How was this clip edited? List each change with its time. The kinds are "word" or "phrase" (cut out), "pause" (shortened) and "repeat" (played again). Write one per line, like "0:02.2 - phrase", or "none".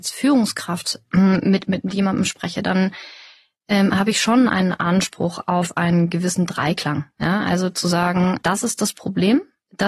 none